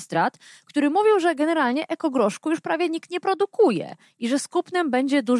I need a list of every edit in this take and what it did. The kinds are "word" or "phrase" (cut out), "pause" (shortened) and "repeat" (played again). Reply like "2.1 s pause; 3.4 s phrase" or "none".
none